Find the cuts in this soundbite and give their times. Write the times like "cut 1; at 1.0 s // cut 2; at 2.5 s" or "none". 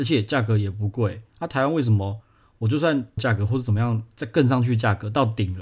cut 1; at 1.3 s // cut 2; at 3.2 s